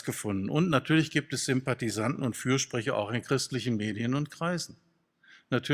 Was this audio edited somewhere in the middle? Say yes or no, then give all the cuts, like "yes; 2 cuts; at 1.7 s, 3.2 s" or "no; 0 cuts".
no; 0 cuts